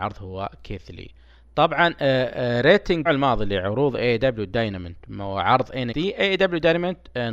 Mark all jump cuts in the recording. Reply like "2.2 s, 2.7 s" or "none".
3.1 s, 5.9 s